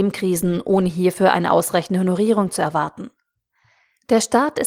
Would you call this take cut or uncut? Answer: uncut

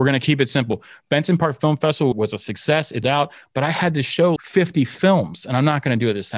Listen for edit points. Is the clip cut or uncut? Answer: cut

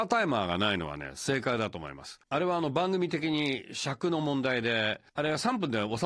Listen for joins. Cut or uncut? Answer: cut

